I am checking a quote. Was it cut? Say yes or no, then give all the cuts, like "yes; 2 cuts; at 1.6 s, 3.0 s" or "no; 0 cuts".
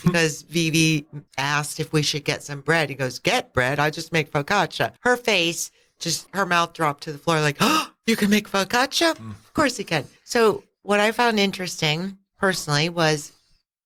yes; 4 cuts; at 1.3 s, 5.0 s, 6.3 s, 10.2 s